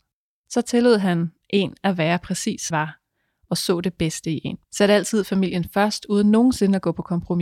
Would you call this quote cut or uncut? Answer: cut